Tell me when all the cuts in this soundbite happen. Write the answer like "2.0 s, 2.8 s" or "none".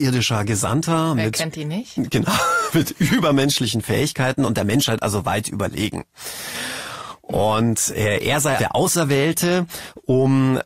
8.6 s